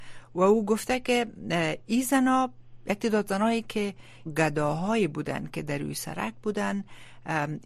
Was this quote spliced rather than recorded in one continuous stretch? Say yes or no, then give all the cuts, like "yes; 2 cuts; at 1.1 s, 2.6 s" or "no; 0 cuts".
yes; 1 cut; at 4.3 s